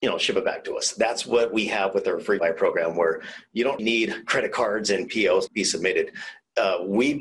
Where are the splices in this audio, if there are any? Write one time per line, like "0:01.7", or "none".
0:02.4
0:03.8
0:05.5